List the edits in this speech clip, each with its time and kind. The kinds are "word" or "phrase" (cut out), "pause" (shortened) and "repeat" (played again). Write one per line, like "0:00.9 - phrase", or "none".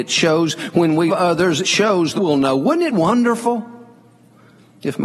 0:01.1 - word
0:01.6 - word
0:02.2 - word
0:02.9 - word